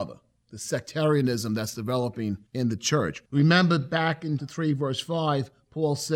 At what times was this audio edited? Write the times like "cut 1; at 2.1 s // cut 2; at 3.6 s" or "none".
cut 1; at 2.5 s // cut 2; at 3.3 s // cut 3; at 4.4 s

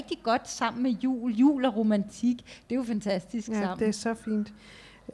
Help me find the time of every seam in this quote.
none

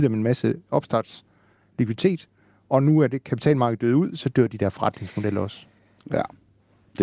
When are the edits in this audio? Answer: none

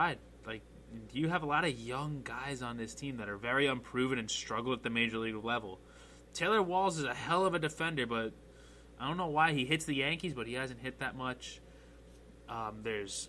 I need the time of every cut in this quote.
none

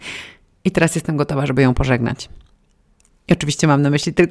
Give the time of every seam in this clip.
none

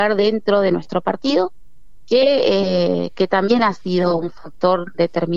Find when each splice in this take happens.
none

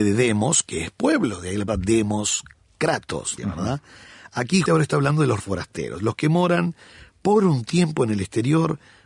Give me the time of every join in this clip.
cut 1; at 1.7 s // cut 2; at 3.4 s // cut 3; at 4.7 s // cut 4; at 5.4 s

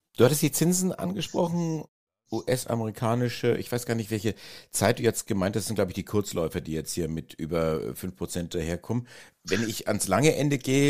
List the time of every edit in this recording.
none

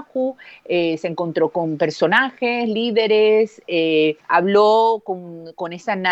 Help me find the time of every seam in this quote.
cut 1; at 4.2 s

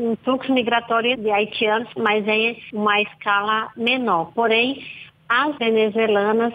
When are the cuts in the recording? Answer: cut 1; at 1.1 s // cut 2; at 2.0 s // cut 3; at 5.6 s

